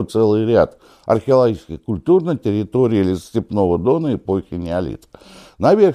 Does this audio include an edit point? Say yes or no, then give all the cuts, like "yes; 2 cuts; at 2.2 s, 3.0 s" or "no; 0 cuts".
no; 0 cuts